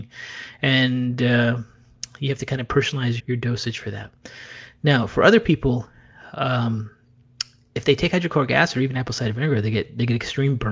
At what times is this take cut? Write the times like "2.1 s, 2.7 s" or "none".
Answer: 3.2 s